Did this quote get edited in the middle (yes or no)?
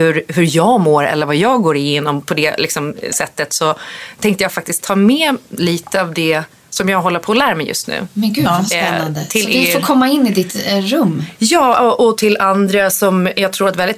no